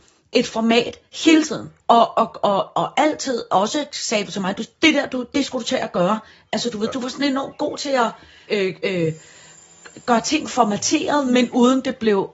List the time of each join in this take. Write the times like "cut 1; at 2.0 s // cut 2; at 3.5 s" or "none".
cut 1; at 1.8 s // cut 2; at 8.5 s